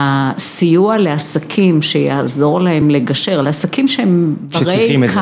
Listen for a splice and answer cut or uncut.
uncut